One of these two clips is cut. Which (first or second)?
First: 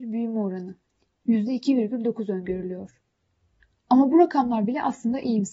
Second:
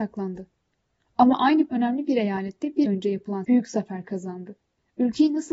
second